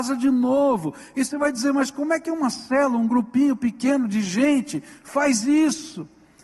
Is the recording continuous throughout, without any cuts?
yes; 0 cuts

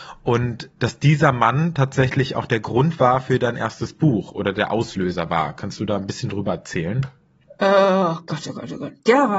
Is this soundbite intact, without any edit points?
yes; 0 cuts

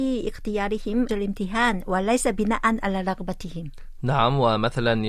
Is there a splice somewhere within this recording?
yes; 1 cut; at 1.1 s

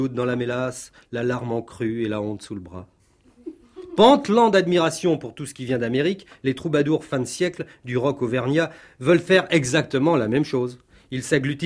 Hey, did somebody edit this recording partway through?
no; 0 cuts

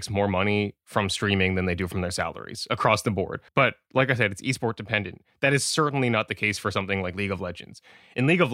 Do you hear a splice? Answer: yes; 1 cut; at 3.5 s

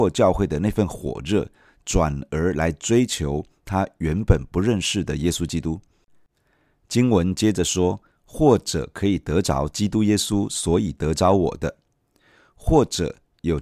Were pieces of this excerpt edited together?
no; 0 cuts

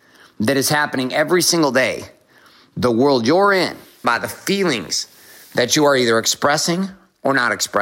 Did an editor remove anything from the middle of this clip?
yes; 1 cut; at 4.0 s

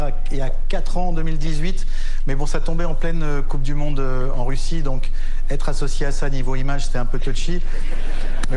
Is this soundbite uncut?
yes; 0 cuts

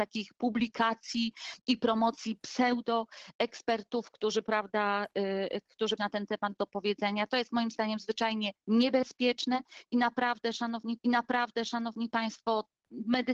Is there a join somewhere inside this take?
yes; 3 cuts; at 6.0 s, 8.6 s, 11.0 s

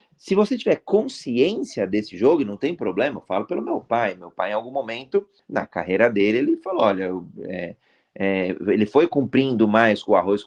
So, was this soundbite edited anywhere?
no; 0 cuts

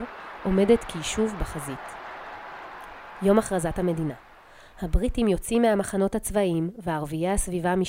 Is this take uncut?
yes; 0 cuts

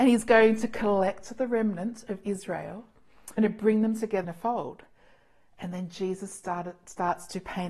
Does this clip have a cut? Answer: yes; 2 cuts; at 3.4 s, 4.2 s

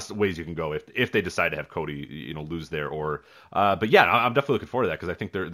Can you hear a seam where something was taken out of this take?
no; 0 cuts

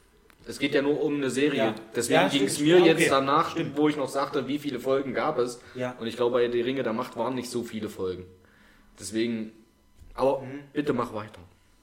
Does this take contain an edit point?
no; 0 cuts

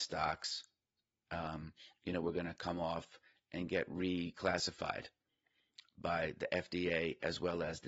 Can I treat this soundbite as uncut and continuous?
yes; 0 cuts

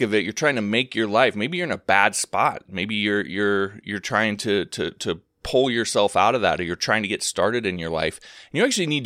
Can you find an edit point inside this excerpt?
no; 0 cuts

